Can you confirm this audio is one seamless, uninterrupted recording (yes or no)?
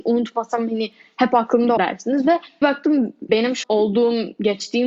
no